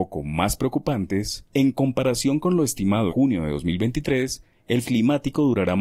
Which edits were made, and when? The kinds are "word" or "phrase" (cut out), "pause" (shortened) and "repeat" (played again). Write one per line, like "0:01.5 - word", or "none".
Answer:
0:01.5 - pause
0:03.1 - word
0:04.8 - word

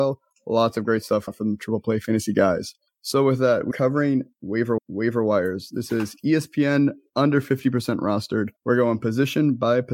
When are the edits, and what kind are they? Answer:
0:01.3 - word
0:02.9 - pause
0:03.7 - word
0:04.8 - repeat
0:08.6 - pause

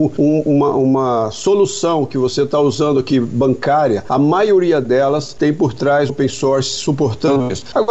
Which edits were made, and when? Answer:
0:06.1 - word

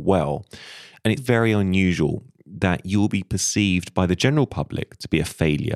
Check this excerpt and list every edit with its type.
0:01.2 - word

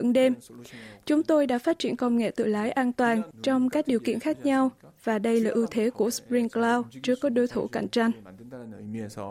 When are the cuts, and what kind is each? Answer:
none

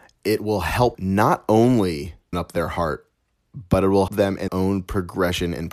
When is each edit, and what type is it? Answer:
0:00.9 - word
0:02.3 - word
0:04.1 - word
0:04.5 - word

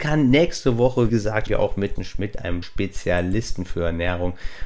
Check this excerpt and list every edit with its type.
0:01.1 - word
0:01.5 - word
0:02.0 - word
0:02.6 - word

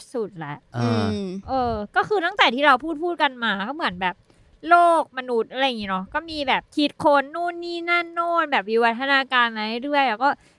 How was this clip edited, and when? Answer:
0:06.7 - pause

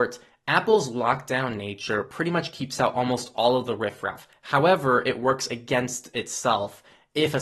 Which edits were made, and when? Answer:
none

